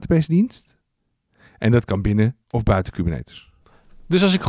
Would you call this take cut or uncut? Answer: cut